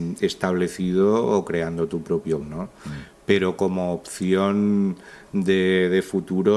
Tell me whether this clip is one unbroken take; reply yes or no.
no